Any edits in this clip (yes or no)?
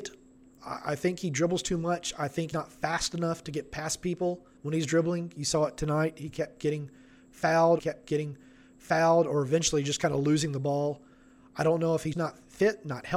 yes